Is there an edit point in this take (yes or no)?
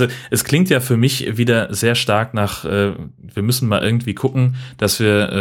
no